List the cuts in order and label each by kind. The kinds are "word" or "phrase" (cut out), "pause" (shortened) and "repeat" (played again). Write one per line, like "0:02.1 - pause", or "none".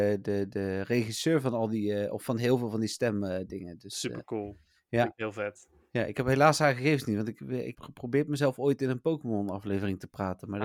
0:07.7 - word